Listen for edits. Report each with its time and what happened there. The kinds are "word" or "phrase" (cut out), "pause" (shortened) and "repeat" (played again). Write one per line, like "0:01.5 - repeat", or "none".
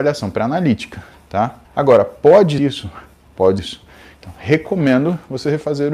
0:01.6 - pause
0:02.6 - word
0:03.6 - word